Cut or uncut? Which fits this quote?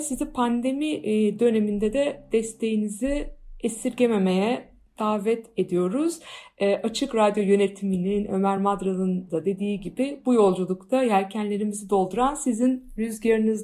uncut